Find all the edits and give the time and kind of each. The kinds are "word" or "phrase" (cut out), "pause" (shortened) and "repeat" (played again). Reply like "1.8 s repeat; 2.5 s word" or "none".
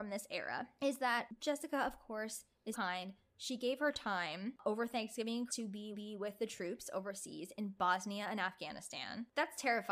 2.7 s word; 5.5 s word; 5.9 s repeat

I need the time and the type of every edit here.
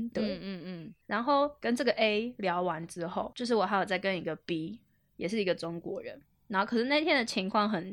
none

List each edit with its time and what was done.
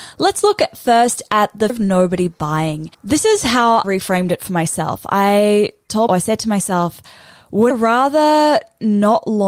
1.7 s word; 2.9 s pause; 3.8 s word; 6.1 s word; 7.7 s word

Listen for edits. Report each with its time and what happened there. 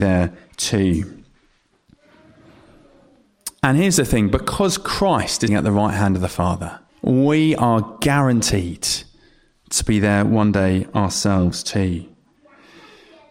5.5 s word; 6.9 s pause

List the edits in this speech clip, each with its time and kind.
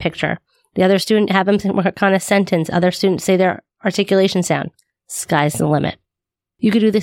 none

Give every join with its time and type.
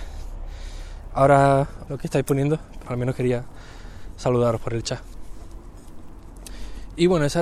1.9 s phrase; 2.9 s word

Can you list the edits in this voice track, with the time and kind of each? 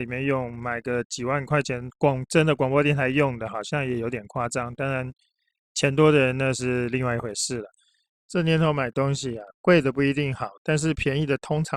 none

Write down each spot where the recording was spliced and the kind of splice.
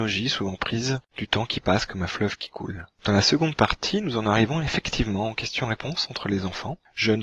1.1 s pause; 2.9 s pause

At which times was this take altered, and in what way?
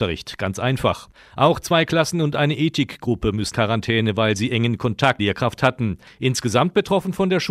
3.5 s word; 5.2 s phrase

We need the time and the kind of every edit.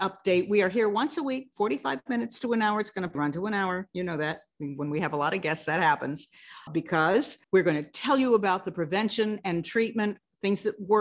3.1 s word; 6.7 s word; 7.4 s pause

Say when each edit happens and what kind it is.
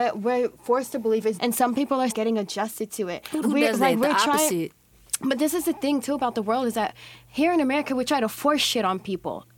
1.4 s word; 2.1 s word; 3.4 s word

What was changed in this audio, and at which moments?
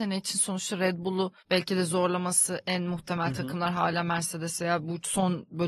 1.4 s pause

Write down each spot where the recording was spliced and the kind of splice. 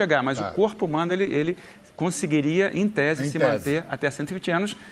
none

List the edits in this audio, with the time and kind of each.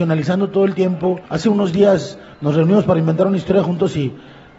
1.3 s pause

